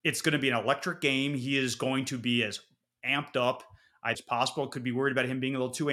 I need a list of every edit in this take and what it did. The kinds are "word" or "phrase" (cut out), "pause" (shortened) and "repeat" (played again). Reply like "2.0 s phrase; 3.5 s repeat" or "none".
4.1 s word